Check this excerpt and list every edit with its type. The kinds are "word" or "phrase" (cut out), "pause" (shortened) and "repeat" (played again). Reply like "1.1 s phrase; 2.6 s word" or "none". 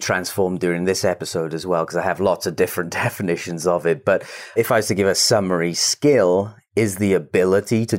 none